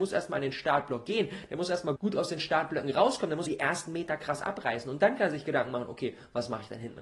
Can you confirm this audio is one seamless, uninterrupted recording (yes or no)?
no